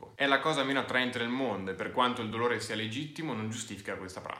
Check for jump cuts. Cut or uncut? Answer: uncut